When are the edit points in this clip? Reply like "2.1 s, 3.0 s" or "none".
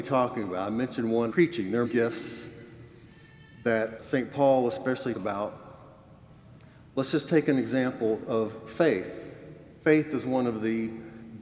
1.3 s, 1.8 s, 4.0 s, 5.1 s